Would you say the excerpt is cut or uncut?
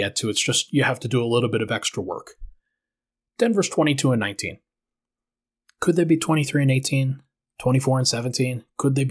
uncut